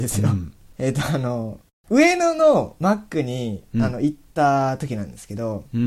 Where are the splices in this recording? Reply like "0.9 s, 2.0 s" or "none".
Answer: none